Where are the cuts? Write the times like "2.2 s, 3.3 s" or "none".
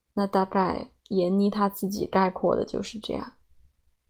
1.0 s